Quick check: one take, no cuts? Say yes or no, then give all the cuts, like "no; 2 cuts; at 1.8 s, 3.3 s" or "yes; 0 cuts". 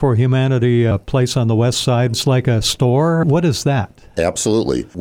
yes; 0 cuts